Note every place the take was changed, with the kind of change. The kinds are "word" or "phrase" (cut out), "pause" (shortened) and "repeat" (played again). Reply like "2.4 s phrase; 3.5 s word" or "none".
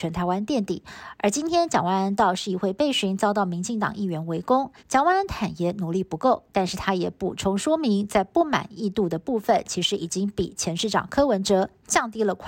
4.8 s pause